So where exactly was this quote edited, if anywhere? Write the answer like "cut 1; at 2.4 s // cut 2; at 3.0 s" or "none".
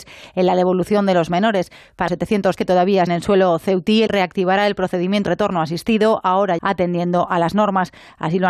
cut 1; at 2.1 s // cut 2; at 2.6 s // cut 3; at 3.1 s // cut 4; at 4.1 s // cut 5; at 5.3 s // cut 6; at 6.6 s